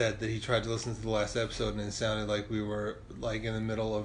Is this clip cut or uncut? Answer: uncut